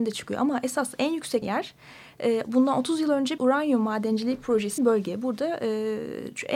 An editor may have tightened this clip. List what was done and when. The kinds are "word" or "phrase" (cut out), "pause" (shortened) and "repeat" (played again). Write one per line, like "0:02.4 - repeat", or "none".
0:01.4 - word
0:03.4 - word
0:04.8 - word